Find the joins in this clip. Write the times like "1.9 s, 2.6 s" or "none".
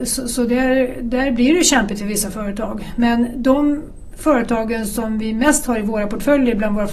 none